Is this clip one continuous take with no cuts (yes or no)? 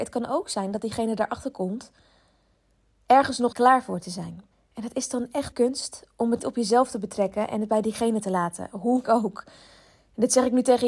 no